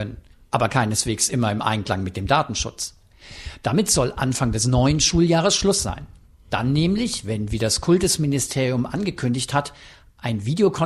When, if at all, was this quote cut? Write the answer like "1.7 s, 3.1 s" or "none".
none